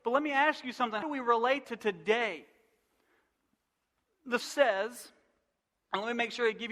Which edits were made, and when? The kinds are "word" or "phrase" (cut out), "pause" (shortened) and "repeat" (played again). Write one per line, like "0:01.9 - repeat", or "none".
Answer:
0:01.0 - word
0:01.6 - word
0:04.4 - word